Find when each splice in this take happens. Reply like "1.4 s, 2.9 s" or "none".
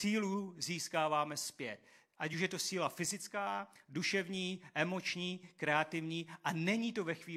none